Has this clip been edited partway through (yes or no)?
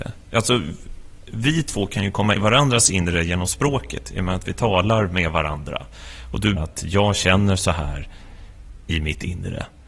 yes